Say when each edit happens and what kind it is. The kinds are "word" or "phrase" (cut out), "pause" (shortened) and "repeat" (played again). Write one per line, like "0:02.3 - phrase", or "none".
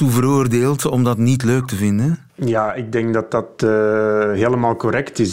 0:02.3 - pause